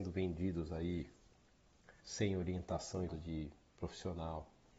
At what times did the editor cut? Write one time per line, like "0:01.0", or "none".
0:02.0
0:03.1